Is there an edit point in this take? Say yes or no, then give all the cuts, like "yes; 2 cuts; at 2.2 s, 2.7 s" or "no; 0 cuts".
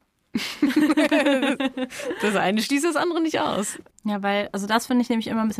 no; 0 cuts